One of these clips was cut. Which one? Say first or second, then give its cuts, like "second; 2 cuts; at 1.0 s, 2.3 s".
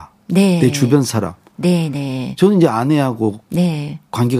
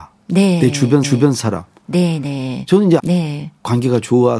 second; 2 cuts; at 1.0 s, 3.0 s